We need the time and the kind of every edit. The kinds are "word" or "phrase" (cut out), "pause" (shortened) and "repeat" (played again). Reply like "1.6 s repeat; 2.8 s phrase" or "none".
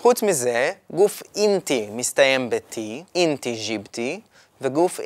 3.1 s pause